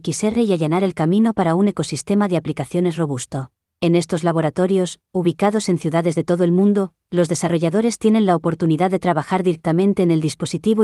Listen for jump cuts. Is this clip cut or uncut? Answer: cut